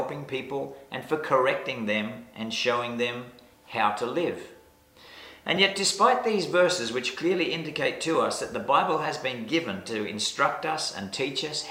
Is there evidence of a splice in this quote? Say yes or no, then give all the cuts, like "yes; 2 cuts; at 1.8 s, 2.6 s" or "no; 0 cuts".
no; 0 cuts